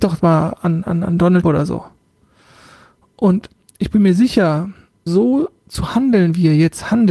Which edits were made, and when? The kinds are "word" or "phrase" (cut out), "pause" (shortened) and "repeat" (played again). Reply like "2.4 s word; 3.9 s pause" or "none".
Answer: 1.4 s word; 5.1 s word